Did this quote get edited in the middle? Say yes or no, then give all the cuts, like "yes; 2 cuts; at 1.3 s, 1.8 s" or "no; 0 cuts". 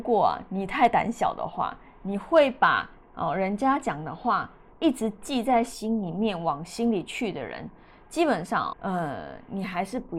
yes; 1 cut; at 8.7 s